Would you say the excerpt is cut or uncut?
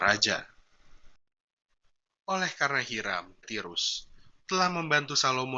cut